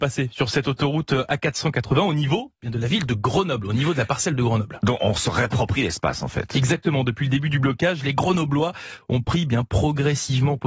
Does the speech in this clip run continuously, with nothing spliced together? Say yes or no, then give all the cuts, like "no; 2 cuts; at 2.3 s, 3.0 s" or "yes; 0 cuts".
yes; 0 cuts